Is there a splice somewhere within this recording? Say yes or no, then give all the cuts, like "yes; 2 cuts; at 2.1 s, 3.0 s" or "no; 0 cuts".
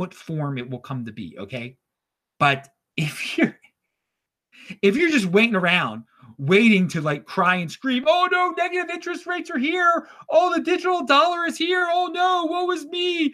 no; 0 cuts